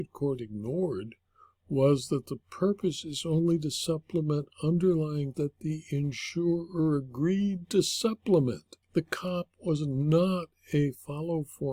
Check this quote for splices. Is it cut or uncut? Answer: cut